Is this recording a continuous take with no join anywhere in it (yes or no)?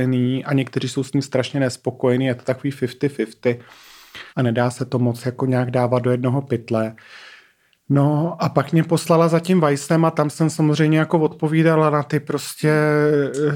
no